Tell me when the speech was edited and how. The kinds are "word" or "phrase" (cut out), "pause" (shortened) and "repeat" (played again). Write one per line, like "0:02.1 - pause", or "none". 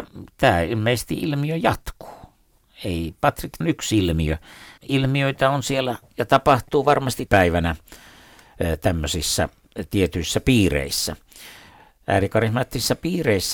0:03.6 - phrase
0:04.8 - word
0:07.3 - word

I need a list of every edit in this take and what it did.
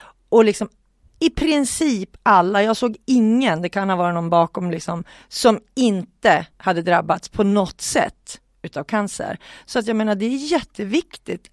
0:06.5 - pause

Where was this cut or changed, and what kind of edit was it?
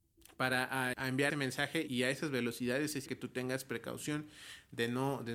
0:00.9 - word
0:01.3 - word
0:01.9 - word
0:03.1 - word

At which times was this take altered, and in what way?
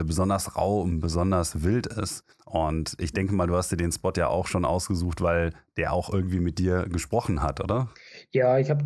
0:02.3 - pause

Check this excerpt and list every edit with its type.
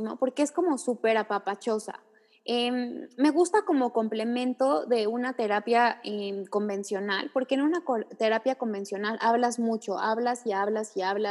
none

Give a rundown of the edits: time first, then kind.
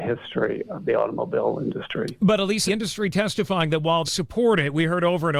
0:02.7 - word
0:04.0 - word

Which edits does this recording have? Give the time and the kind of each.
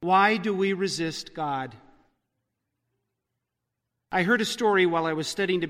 none

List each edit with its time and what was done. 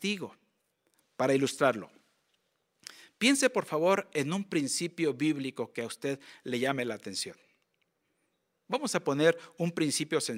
none

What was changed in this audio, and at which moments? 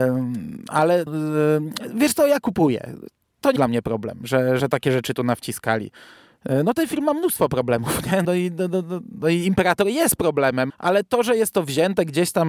0:01.1 - word
0:03.6 - word
0:04.6 - word
0:08.2 - word
0:10.7 - word

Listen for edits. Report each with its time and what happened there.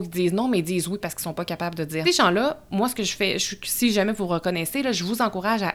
0:01.0 - word
0:02.0 - phrase

